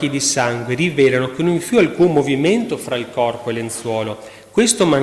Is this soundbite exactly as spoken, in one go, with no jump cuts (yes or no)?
yes